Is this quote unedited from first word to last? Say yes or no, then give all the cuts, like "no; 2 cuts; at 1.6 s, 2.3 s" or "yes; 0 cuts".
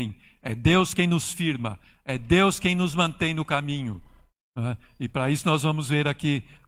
yes; 0 cuts